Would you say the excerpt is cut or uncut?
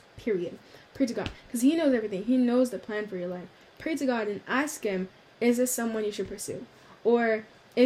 uncut